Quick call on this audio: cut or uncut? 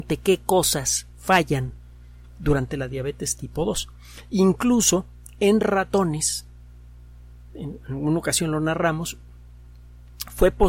uncut